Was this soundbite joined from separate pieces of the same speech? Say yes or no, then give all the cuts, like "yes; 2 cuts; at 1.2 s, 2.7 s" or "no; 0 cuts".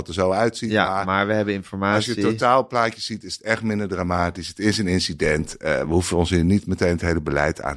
no; 0 cuts